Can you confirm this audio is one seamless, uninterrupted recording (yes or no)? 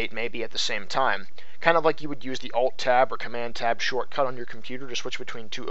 yes